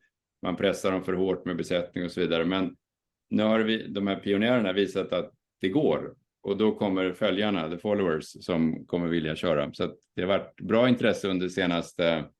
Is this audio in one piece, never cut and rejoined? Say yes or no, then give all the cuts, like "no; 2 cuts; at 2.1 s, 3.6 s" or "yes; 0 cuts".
no; 1 cut; at 3.2 s